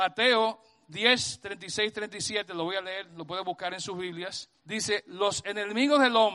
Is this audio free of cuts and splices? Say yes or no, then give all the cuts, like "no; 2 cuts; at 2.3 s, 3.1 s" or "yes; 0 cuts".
no; 1 cut; at 4.6 s